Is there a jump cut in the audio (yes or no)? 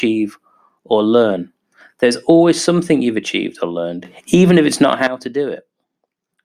no